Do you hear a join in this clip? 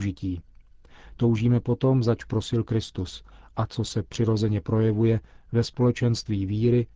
no; 0 cuts

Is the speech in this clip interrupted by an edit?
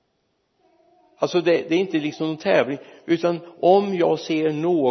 no; 0 cuts

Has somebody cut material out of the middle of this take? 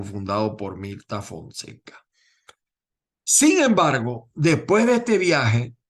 no; 0 cuts

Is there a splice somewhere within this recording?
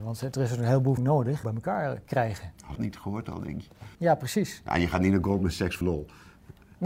yes; 5 cuts; at 1.0 s, 1.4 s, 2.8 s, 3.9 s, 5.8 s

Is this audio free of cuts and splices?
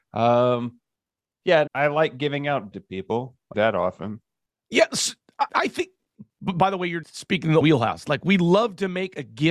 no; 6 cuts; at 1.7 s, 2.7 s, 3.5 s, 5.5 s, 7.0 s, 7.6 s

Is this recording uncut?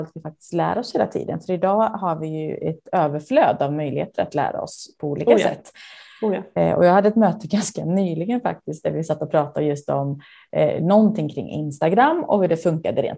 yes; 0 cuts

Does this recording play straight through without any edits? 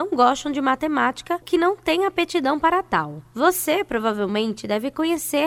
no; 1 cut; at 1.4 s

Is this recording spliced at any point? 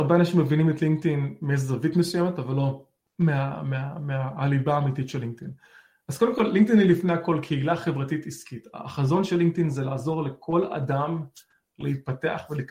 no; 0 cuts

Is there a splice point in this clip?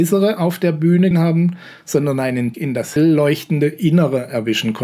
yes; 3 cuts; at 1.1 s, 2.5 s, 3.0 s

